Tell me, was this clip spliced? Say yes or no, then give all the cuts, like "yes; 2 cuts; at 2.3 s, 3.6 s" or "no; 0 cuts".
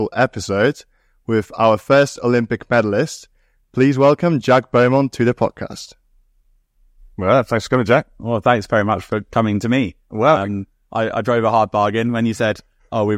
no; 0 cuts